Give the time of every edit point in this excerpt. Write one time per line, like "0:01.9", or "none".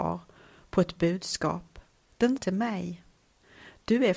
0:02.4

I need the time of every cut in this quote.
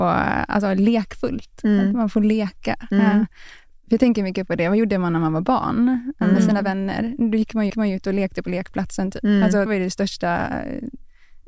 0:07.7
0:09.7

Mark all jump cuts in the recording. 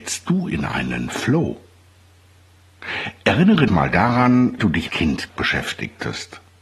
0:03.7
0:04.6
0:04.9
0:05.3

